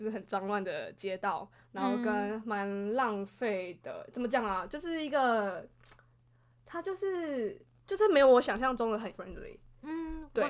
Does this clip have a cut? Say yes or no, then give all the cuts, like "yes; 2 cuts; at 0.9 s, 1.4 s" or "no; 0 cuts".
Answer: yes; 1 cut; at 9.1 s